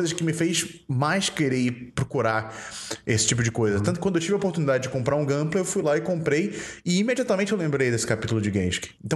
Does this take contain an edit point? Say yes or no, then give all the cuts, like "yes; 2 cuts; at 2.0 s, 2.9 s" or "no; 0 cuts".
no; 0 cuts